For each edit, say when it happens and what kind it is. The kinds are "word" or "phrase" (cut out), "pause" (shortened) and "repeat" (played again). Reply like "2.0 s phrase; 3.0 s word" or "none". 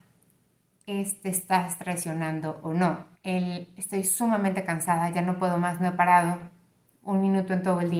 3.2 s pause